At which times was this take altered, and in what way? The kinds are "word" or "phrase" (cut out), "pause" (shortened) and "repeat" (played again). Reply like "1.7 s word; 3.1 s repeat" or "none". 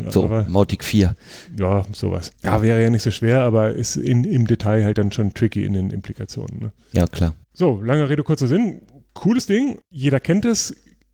2.3 s pause; 7.4 s pause; 9.8 s pause